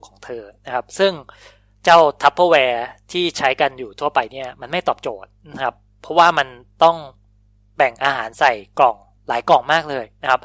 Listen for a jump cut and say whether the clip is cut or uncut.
uncut